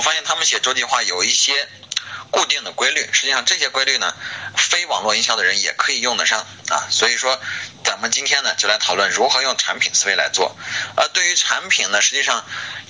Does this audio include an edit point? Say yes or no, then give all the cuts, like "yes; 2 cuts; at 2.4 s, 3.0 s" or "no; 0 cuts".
yes; 1 cut; at 4.5 s